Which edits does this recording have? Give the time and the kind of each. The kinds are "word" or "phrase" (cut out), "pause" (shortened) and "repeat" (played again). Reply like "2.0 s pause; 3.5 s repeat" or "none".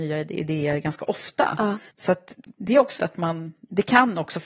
1.9 s pause; 2.6 s phrase; 3.0 s word